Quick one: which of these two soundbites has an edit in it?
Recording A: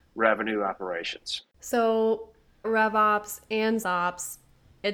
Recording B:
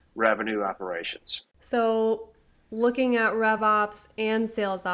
A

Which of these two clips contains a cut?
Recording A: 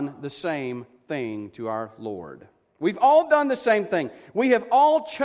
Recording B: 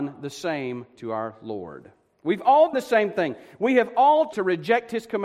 B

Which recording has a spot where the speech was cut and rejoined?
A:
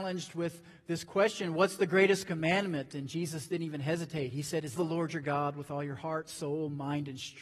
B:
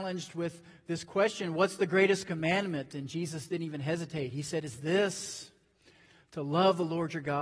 A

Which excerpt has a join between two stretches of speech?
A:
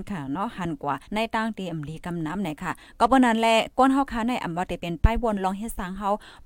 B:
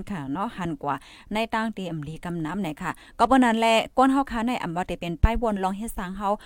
A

